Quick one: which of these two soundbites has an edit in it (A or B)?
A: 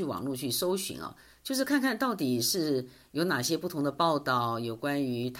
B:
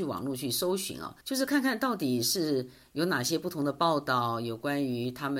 B